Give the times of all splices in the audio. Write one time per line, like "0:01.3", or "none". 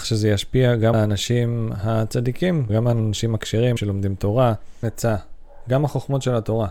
0:00.9
0:02.7
0:03.8
0:04.8